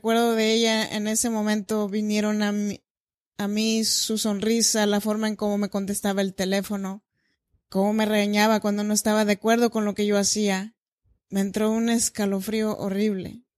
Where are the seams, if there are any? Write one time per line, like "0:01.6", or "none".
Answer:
none